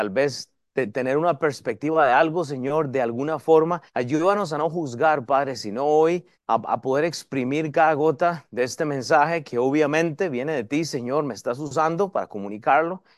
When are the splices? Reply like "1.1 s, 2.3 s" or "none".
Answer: 3.9 s, 6.3 s